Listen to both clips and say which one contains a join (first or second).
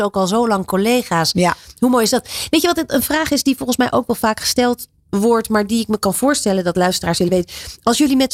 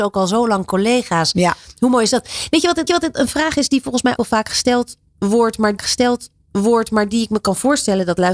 second